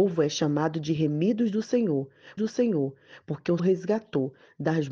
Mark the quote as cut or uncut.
cut